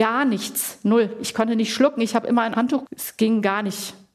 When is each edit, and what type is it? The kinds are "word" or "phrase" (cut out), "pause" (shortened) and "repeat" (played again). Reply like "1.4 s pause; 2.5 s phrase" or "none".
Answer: 2.5 s word; 2.9 s word